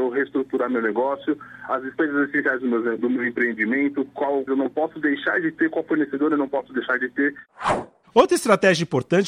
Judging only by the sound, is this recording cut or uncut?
cut